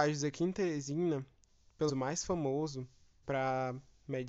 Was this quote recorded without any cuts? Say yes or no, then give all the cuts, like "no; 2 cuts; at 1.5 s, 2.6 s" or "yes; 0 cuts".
no; 2 cuts; at 1.9 s, 3.2 s